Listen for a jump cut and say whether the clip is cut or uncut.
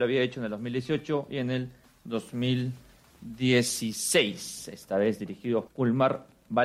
cut